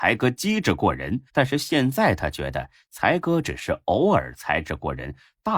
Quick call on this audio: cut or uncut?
cut